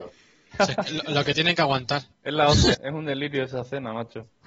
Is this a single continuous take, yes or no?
no